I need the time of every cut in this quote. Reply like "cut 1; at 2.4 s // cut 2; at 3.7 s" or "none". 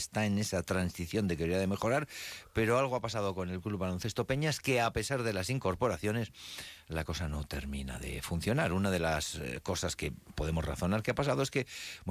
none